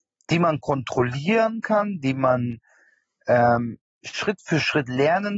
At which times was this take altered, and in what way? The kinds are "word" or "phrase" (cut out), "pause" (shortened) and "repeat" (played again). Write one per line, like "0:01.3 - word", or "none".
none